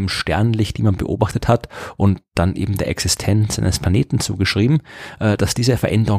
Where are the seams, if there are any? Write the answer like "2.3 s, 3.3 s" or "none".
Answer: none